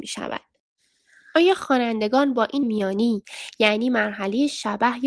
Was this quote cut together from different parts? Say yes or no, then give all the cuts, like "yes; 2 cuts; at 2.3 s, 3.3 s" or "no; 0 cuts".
yes; 1 cut; at 2.6 s